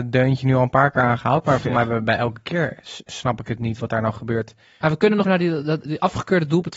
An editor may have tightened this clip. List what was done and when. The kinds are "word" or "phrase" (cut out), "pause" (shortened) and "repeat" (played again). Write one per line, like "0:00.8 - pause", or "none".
0:05.2 - word